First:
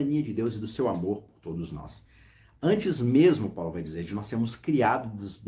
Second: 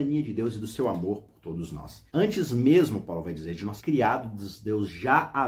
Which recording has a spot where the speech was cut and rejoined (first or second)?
second